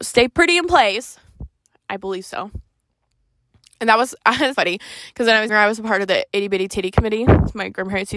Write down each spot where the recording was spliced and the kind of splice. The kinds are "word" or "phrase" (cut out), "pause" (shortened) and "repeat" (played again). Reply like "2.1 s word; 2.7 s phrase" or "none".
4.5 s word; 5.5 s word